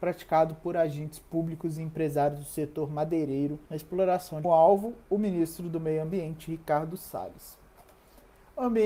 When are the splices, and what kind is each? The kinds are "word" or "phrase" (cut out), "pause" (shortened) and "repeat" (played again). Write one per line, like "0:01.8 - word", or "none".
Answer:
0:03.6 - pause
0:04.4 - phrase
0:05.0 - pause

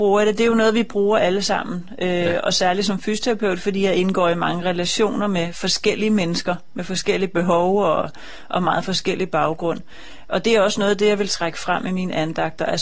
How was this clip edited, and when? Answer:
none

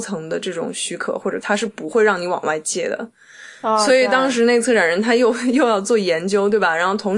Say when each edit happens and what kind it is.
0:01.4 - word

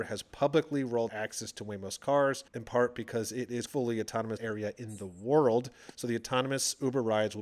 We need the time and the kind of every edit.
0:01.1 - word
0:02.5 - pause
0:03.7 - phrase
0:04.4 - word

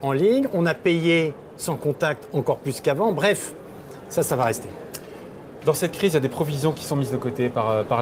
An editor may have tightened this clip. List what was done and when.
none

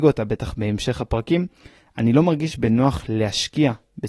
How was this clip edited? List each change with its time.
none

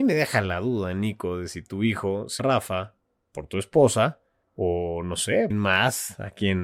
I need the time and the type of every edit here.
0:02.4 - word
0:04.4 - pause
0:05.5 - phrase

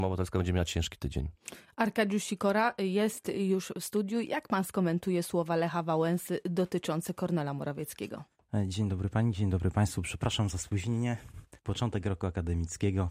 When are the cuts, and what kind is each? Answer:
none

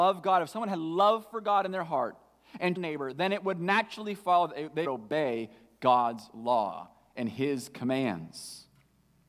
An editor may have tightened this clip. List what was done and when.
0:02.8 - phrase
0:04.8 - word

